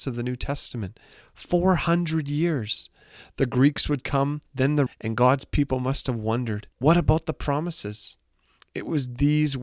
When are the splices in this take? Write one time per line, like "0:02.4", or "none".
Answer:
0:04.5
0:04.9
0:06.7